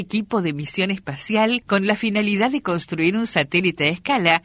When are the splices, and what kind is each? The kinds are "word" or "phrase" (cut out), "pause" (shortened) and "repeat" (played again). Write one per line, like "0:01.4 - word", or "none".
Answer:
none